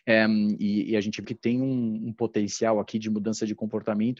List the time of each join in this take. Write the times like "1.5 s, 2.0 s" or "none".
1.2 s